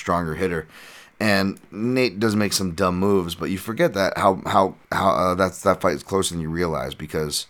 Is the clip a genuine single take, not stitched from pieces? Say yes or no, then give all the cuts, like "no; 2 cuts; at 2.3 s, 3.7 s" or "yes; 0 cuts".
no; 1 cut; at 4.8 s